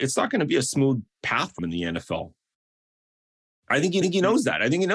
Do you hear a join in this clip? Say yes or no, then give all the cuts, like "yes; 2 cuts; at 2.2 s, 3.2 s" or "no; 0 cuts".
yes; 2 cuts; at 1.6 s, 4.0 s